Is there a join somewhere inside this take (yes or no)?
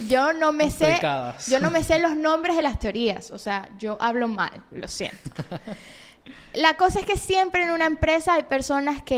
no